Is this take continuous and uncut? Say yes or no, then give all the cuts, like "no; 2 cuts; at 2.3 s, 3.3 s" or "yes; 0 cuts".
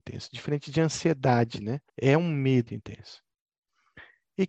no; 2 cuts; at 1.9 s, 2.7 s